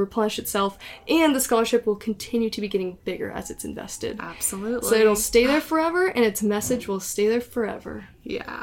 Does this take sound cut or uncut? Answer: uncut